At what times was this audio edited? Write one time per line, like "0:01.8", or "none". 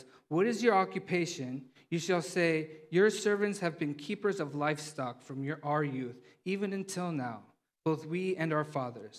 none